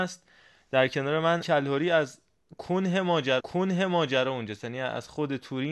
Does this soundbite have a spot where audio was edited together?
yes; 2 cuts; at 1.4 s, 3.4 s

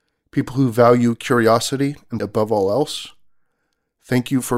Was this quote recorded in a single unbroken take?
no; 1 cut; at 2.2 s

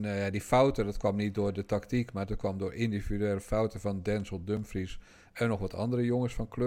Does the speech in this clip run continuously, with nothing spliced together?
yes; 0 cuts

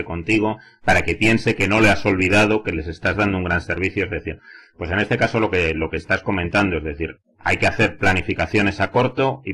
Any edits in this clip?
no; 0 cuts

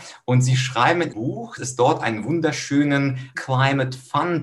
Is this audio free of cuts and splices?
no; 3 cuts; at 1.1 s, 1.6 s, 3.3 s

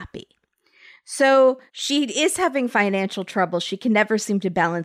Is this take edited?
yes; 1 cut; at 1.7 s

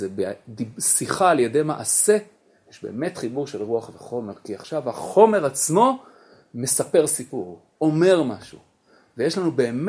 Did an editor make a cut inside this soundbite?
no; 0 cuts

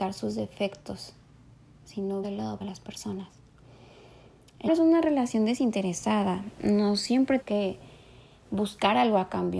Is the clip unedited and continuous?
no; 4 cuts; at 2.2 s, 2.6 s, 4.7 s, 7.4 s

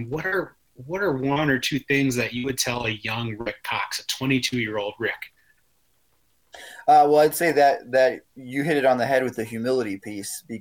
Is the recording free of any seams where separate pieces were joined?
yes; 0 cuts

